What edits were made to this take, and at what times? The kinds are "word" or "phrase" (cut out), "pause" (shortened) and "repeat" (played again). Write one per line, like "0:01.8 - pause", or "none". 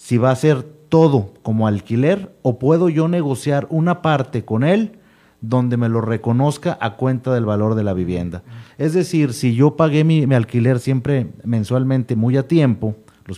none

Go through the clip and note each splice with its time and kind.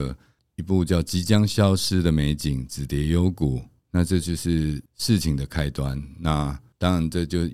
0:04.9 - pause

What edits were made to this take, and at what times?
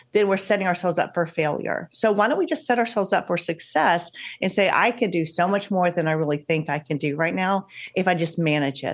none

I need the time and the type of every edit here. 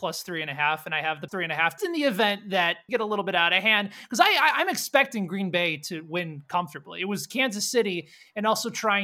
0:01.3 - phrase
0:01.8 - word
0:02.9 - phrase

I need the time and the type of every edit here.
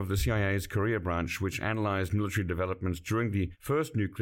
none

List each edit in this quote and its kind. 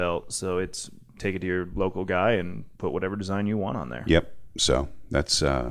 0:02.7 - pause

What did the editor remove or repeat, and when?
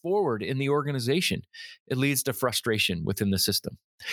none

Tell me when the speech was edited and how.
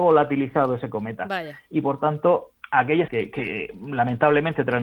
0:03.1 - word

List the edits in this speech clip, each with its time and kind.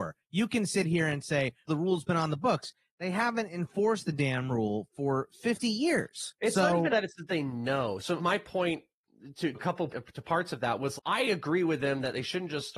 0:01.7 - word
0:06.9 - word
0:08.2 - word
0:09.5 - word
0:09.9 - word
0:11.0 - word

